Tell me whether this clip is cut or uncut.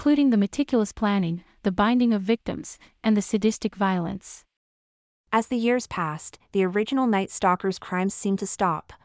uncut